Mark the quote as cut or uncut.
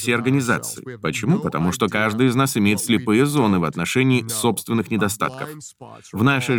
uncut